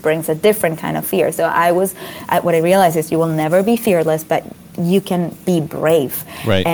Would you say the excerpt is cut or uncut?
uncut